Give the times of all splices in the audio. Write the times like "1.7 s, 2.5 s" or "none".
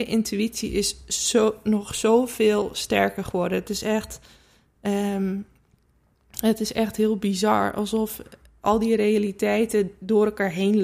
none